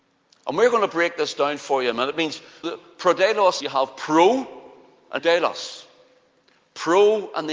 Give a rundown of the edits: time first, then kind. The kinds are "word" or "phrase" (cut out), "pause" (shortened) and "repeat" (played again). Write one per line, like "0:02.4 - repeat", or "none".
0:02.6 - word
0:03.6 - word
0:05.2 - word

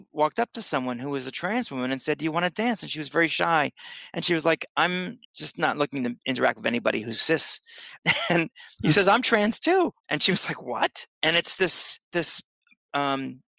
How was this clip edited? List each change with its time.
0:05.2 - pause
0:10.0 - pause
0:11.1 - pause
0:12.0 - pause

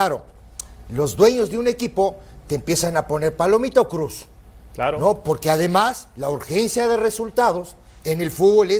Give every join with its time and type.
none

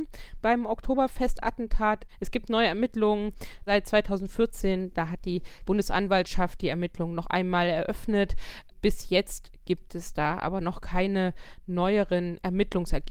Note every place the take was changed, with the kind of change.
none

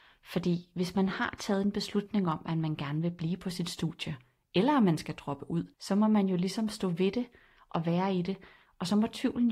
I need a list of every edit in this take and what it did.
0:05.7 - pause

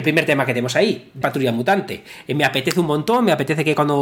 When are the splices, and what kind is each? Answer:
0:01.2 - word

